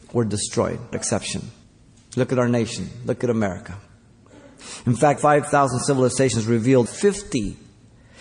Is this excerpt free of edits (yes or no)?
no